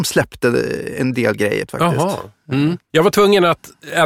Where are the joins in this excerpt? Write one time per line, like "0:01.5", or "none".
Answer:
0:01.7
0:02.8